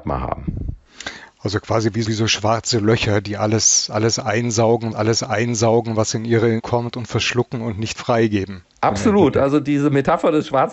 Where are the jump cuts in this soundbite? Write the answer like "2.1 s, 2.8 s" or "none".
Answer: 2.0 s, 4.9 s, 6.6 s, 8.0 s, 8.8 s